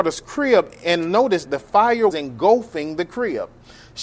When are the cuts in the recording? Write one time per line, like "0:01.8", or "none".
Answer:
0:01.4
0:02.1